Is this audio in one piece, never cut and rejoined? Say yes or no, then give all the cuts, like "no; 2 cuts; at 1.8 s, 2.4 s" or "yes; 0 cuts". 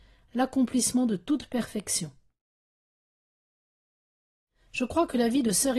yes; 0 cuts